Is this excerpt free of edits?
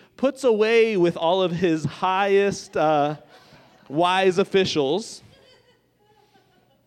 yes; 0 cuts

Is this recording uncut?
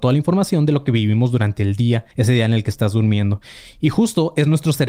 no; 1 cut; at 2.1 s

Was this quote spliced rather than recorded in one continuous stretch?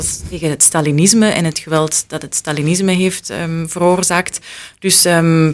no; 0 cuts

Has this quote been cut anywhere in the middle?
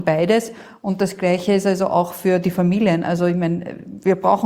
no; 0 cuts

